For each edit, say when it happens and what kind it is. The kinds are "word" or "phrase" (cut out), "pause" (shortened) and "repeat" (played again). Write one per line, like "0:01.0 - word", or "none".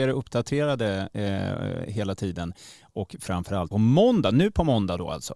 0:03.7 - phrase

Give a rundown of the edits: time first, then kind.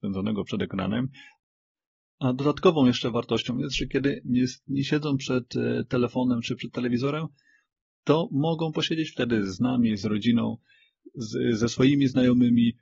none

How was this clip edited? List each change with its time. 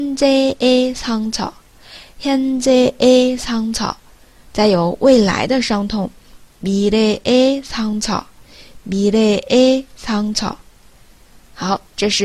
none

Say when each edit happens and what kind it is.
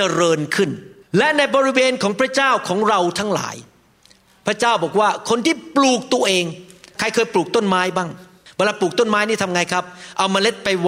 none

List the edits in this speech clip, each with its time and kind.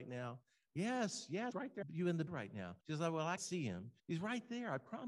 0:01.5 - word
0:01.8 - phrase
0:02.3 - word
0:02.8 - pause
0:03.4 - word
0:04.0 - pause

